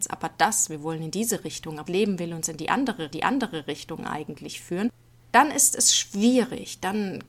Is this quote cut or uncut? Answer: cut